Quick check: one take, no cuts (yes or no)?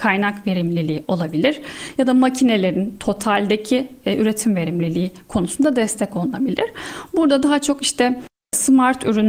yes